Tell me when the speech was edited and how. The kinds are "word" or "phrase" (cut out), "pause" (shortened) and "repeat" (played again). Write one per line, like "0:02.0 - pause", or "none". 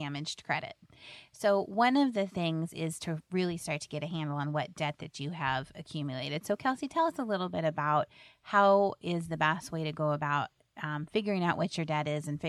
none